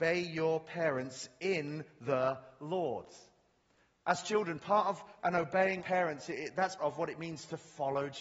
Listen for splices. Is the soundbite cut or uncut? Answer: cut